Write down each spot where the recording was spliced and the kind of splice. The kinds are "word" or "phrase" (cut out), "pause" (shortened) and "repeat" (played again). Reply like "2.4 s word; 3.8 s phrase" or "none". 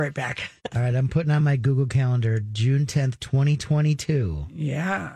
none